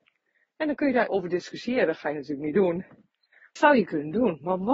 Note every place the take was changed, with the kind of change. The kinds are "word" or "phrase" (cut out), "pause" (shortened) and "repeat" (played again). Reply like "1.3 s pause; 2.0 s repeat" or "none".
1.1 s word; 3.6 s word